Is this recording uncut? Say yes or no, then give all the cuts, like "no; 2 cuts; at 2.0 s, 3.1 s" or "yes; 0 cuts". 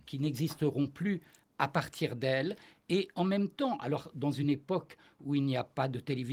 yes; 0 cuts